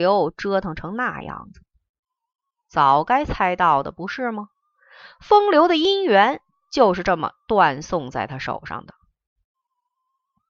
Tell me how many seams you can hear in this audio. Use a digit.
0